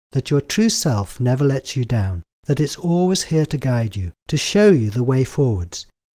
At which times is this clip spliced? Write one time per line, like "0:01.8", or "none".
0:02.3
0:04.2